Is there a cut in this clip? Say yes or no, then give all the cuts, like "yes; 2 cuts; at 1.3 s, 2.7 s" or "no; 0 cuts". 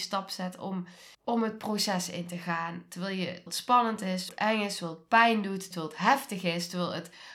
yes; 4 cuts; at 1.1 s, 3.5 s, 4.3 s, 5.7 s